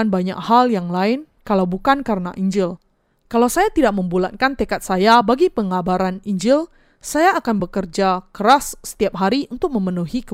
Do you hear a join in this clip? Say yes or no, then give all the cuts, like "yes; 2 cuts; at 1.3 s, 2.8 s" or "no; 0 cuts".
no; 0 cuts